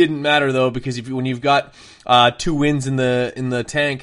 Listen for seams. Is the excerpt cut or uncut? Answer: uncut